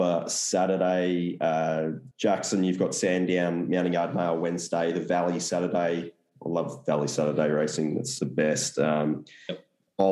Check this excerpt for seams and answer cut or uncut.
cut